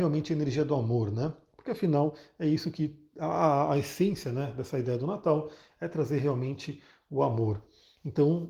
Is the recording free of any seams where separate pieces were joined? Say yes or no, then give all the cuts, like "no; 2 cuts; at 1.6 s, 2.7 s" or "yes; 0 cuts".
yes; 0 cuts